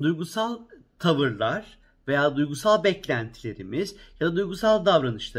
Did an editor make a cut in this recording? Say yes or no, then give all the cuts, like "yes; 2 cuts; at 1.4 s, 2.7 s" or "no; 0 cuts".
no; 0 cuts